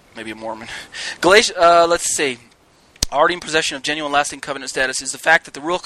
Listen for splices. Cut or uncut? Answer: uncut